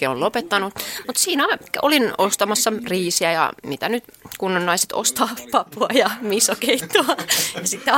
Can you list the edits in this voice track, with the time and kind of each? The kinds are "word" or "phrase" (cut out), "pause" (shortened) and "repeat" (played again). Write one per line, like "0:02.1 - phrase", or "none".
none